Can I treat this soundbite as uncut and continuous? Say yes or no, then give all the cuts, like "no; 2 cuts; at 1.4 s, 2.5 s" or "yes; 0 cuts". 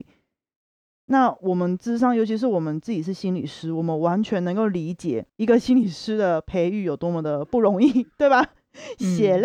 no; 1 cut; at 5.3 s